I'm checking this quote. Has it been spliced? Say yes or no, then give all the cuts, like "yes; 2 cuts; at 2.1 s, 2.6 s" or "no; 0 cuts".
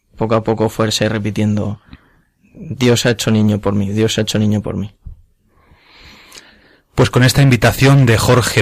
no; 0 cuts